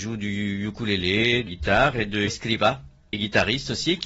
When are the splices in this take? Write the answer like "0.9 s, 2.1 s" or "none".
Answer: 1.5 s, 2.3 s, 3.1 s

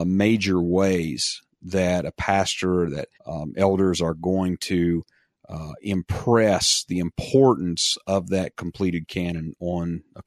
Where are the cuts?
3.1 s

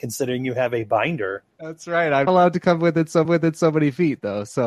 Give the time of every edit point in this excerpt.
1.5 s, 2.3 s, 3.2 s

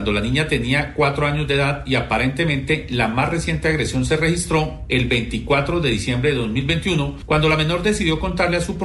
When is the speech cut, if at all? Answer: none

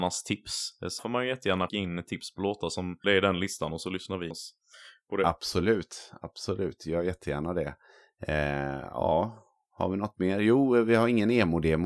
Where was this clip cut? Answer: 1.0 s, 1.7 s, 3.0 s, 4.3 s

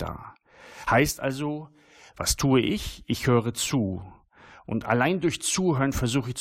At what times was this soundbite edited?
none

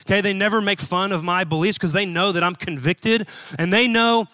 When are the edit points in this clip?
none

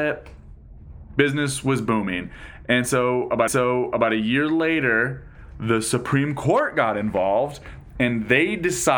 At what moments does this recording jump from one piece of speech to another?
3.5 s

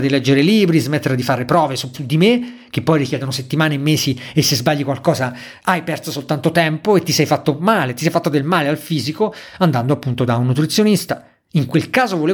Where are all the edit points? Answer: 1.9 s

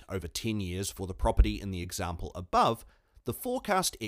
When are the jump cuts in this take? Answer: none

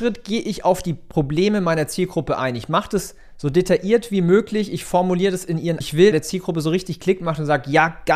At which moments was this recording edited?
5.8 s, 6.1 s

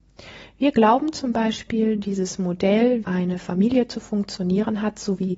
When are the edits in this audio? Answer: 3.0 s

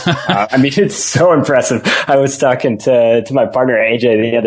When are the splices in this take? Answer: none

